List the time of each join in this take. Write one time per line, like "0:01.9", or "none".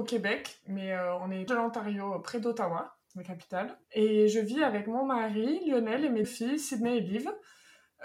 0:01.5
0:03.0
0:03.8
0:06.2